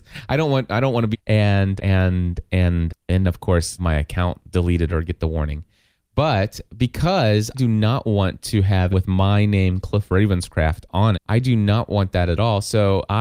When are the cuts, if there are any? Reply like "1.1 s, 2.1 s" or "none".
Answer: 1.1 s, 1.8 s, 2.9 s, 3.2 s, 3.8 s, 4.9 s, 7.5 s, 8.9 s, 11.1 s